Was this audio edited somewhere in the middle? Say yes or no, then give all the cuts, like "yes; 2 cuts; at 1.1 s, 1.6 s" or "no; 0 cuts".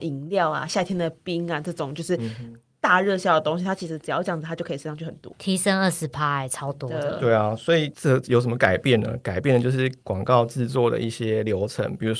yes; 1 cut; at 5.3 s